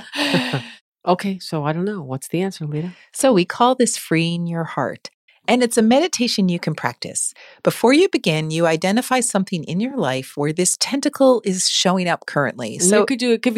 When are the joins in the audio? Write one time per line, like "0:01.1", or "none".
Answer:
none